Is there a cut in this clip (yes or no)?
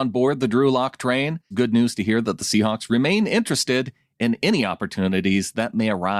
yes